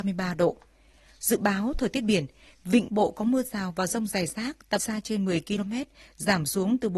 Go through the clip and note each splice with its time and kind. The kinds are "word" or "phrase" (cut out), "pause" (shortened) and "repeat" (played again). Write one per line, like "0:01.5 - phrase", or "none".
0:02.9 - word
0:04.8 - word